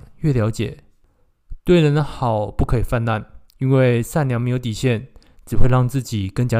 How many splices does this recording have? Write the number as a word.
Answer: one